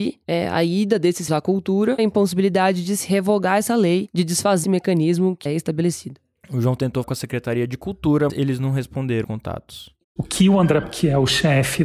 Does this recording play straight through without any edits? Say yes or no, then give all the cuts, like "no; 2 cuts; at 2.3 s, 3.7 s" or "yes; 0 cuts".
no; 8 cuts; at 1.3 s, 2.0 s, 4.6 s, 5.5 s, 7.0 s, 8.3 s, 9.2 s, 10.8 s